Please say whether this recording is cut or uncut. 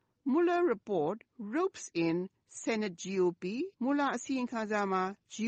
cut